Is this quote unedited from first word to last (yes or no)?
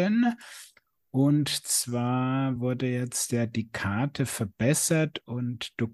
yes